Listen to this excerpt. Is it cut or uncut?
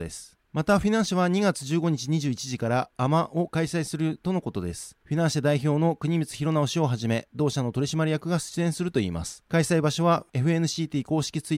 uncut